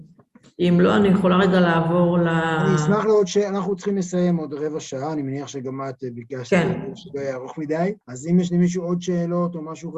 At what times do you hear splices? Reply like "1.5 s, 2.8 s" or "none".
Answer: 8.0 s